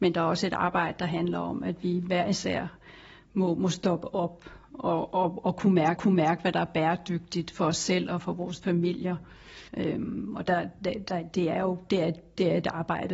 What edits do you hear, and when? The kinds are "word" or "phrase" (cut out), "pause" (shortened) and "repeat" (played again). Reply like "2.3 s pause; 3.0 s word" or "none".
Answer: 6.0 s repeat; 9.7 s pause